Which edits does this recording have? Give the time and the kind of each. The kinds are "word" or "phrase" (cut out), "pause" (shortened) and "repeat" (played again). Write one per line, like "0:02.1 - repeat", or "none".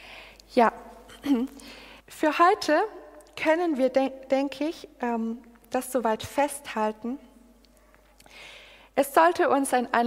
0:02.0 - pause

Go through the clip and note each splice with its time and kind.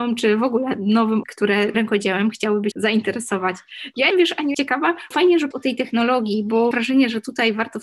0:01.2 - word
0:01.7 - word
0:02.7 - word
0:04.1 - word
0:04.5 - word
0:05.1 - word
0:05.5 - word
0:06.7 - word

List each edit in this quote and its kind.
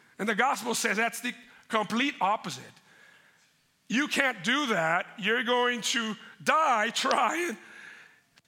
none

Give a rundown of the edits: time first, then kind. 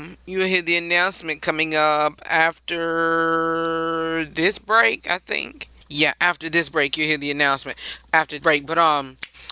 0:05.8 - pause
0:08.4 - word

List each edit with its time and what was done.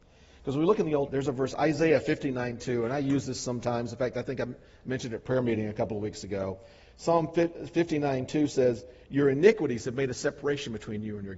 0:01.1 - word

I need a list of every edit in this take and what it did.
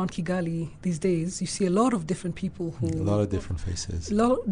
none

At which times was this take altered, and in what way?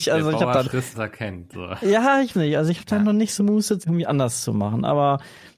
0:00.9 - word
0:02.3 - word
0:03.4 - word
0:03.8 - phrase

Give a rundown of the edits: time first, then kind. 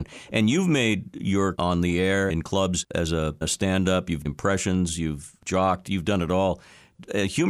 0:01.5 - word
0:02.3 - word
0:03.4 - word
0:04.2 - word

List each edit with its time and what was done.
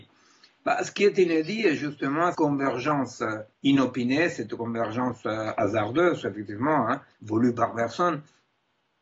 0:02.3 - word
0:03.5 - pause
0:07.1 - pause

